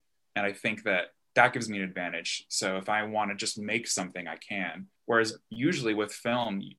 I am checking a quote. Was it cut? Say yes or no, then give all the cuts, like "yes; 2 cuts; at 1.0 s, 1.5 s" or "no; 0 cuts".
yes; 1 cut; at 5.0 s